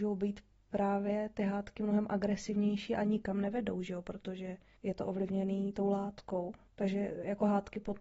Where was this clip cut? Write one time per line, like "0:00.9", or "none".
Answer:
0:04.8
0:06.7